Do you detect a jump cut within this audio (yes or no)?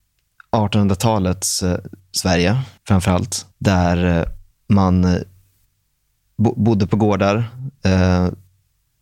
yes